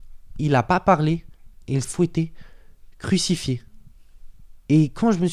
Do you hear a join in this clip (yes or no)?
yes